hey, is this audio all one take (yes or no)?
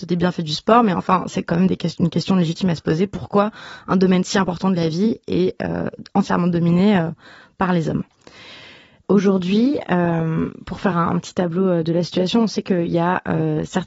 yes